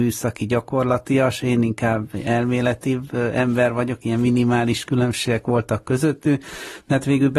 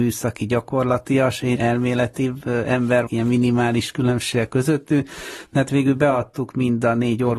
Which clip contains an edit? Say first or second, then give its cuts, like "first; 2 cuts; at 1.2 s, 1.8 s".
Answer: second; 3 cuts; at 1.6 s, 3.1 s, 4.5 s